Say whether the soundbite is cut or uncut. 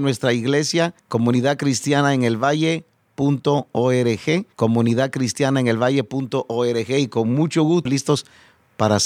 cut